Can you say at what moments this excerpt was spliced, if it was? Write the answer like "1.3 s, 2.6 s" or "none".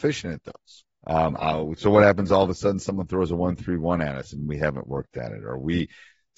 0.9 s